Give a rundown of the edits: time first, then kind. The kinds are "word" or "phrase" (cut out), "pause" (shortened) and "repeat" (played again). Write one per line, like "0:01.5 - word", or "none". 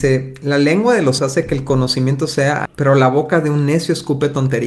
0:01.2 - word
0:02.7 - word